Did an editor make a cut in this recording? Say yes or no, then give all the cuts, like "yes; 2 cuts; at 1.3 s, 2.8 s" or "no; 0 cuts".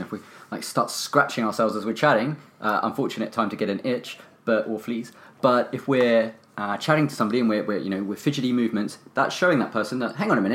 no; 0 cuts